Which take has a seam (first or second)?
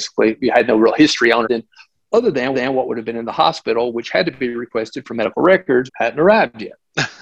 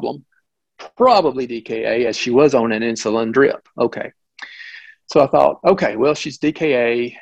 first